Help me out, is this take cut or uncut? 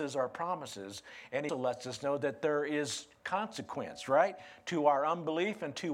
cut